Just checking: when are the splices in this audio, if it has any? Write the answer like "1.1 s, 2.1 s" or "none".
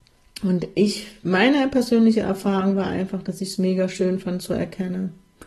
none